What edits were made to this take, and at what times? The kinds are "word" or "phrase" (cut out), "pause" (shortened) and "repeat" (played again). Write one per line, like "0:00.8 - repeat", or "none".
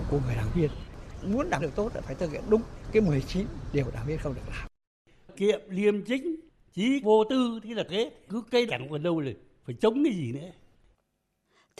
0:01.6 - word
0:05.3 - word
0:07.0 - word
0:07.9 - word
0:08.3 - word
0:08.7 - phrase